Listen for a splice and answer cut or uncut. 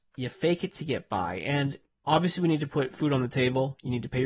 uncut